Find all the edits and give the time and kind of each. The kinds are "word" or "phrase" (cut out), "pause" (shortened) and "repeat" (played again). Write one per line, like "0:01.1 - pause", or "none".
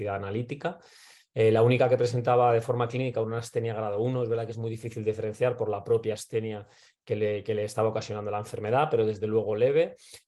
none